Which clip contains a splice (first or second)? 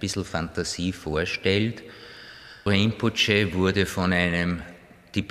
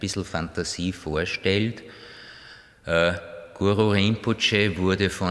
first